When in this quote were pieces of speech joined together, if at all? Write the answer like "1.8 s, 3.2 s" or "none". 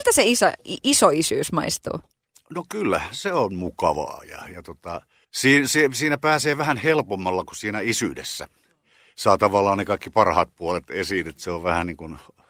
none